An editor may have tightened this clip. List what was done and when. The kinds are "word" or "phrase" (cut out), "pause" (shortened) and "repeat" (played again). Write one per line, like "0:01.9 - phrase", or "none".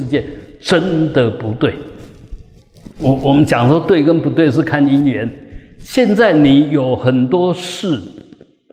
0:02.9 - pause